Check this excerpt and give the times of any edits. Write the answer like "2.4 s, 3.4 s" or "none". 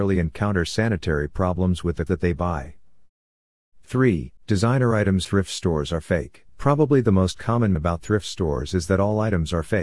2.1 s, 4.4 s, 5.2 s, 6.5 s, 7.7 s